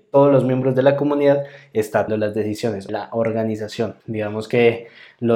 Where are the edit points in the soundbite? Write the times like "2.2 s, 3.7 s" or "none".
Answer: 2.1 s, 2.9 s, 4.0 s